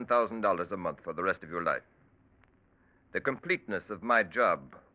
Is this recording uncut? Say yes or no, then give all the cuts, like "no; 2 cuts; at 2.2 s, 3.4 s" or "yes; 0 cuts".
yes; 0 cuts